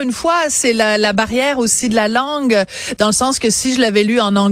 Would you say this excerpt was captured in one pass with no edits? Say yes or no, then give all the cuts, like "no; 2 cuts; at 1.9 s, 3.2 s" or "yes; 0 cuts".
yes; 0 cuts